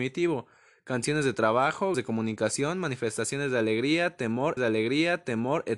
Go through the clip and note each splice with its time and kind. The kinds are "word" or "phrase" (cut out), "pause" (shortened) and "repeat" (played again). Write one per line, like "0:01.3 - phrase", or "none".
0:01.9 - word
0:04.6 - repeat

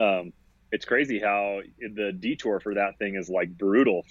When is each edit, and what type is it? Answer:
none

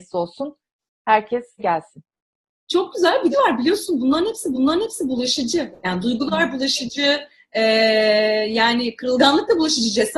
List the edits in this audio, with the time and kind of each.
0:01.6 - phrase
0:03.3 - phrase
0:04.5 - repeat

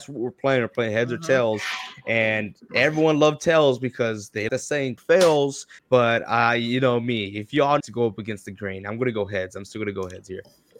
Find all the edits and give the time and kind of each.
0:04.5 - word
0:05.0 - phrase
0:05.8 - pause
0:07.8 - phrase

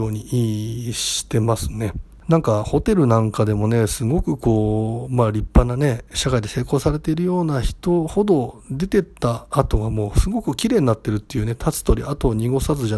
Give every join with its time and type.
0:06.1 - phrase

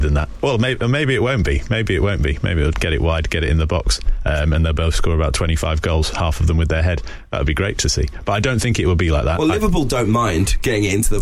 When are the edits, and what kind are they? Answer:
0:02.7 - word

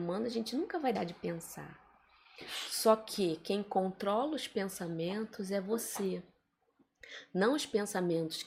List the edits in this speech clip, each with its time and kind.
0:00.9 - word

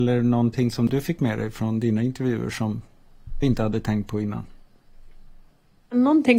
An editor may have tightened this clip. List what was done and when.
0:03.4 - word

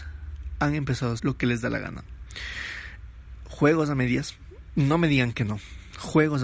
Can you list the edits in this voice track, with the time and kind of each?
0:01.2 - word

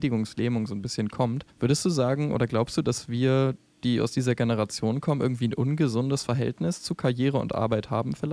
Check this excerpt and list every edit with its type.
0:01.5 - pause

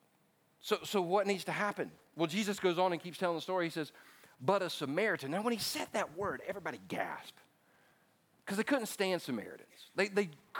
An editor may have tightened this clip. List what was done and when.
none

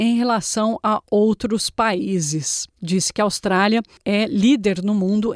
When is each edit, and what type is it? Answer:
0:02.7 - pause

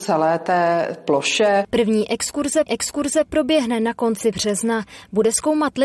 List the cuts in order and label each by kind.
0:02.7 - repeat

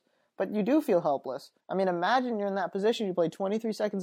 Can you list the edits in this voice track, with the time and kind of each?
0:01.6 - pause

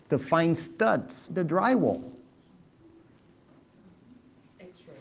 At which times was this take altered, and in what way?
0:01.3 - word

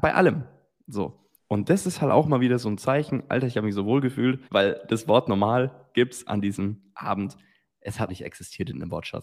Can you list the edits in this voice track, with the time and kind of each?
0:01.4 - pause
0:04.4 - pause
0:08.1 - word

